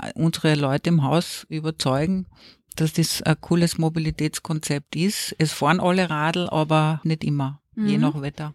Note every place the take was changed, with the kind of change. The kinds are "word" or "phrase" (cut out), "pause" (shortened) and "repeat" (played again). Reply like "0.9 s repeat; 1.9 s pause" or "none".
7.0 s word